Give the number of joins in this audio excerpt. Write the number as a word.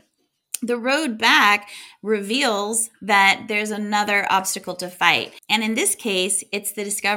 zero